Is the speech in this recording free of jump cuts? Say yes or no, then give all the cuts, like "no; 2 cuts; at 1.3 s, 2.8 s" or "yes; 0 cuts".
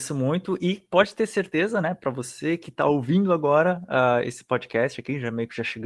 yes; 0 cuts